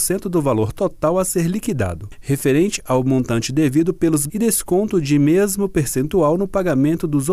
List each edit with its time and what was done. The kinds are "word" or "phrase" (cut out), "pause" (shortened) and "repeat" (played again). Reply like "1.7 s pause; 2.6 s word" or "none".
4.3 s word